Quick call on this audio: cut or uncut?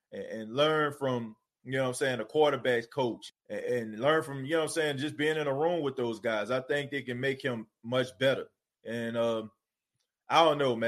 cut